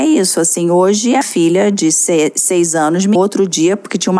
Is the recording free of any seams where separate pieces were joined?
no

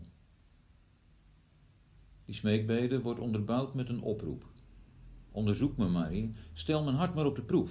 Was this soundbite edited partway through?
no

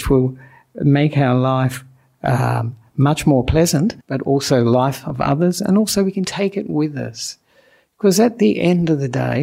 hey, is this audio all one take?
no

